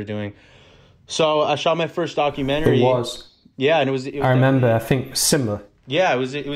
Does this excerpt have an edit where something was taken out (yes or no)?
no